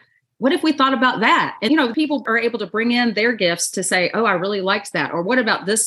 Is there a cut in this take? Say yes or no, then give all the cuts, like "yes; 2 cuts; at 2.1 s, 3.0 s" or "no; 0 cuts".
yes; 1 cut; at 1.7 s